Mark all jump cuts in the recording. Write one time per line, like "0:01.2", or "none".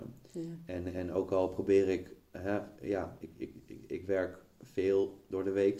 none